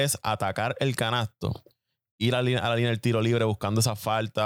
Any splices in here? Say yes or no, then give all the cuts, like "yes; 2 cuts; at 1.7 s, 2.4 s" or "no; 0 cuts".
no; 0 cuts